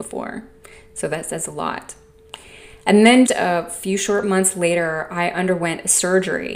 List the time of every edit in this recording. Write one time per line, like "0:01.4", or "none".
0:03.3

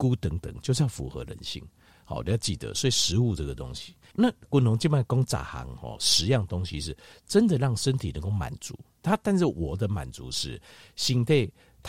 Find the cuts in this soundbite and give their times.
0:04.1

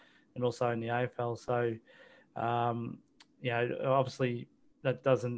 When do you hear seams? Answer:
none

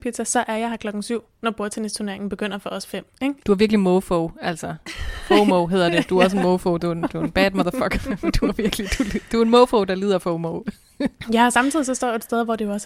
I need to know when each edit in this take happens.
none

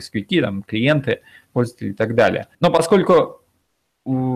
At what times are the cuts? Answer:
0:02.5

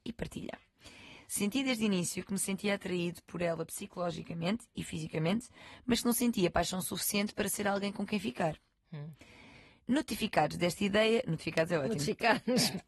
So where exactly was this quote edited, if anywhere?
none

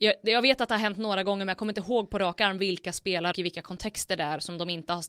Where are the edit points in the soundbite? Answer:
0:03.3

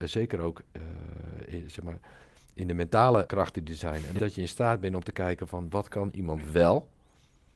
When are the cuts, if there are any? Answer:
0:03.3
0:04.2

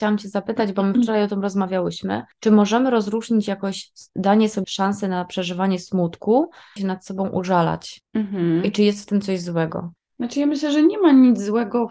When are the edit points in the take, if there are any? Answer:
0:02.3
0:04.1
0:04.6
0:06.8

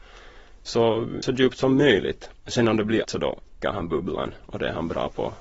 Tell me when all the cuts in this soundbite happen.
0:01.2
0:03.0
0:03.6

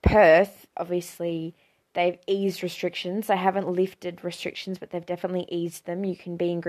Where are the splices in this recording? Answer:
none

